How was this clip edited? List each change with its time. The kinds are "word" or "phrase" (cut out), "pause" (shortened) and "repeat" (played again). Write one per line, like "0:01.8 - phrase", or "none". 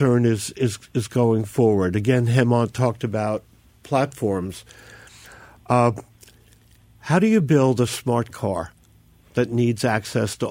none